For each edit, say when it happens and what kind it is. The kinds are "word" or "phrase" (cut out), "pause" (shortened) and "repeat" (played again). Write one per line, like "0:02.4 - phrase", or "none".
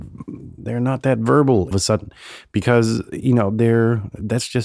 0:01.7 - phrase